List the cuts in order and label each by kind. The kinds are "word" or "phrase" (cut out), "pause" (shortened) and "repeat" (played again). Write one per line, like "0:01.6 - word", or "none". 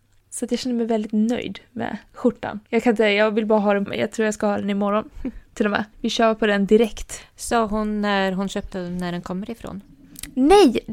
0:02.6 - pause
0:03.9 - word
0:05.9 - pause
0:08.7 - phrase